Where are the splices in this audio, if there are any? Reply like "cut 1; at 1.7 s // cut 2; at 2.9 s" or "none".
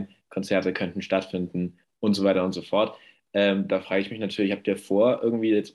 none